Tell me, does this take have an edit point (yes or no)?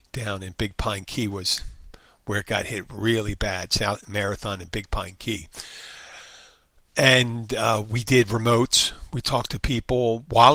no